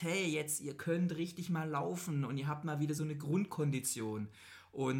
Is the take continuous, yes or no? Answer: no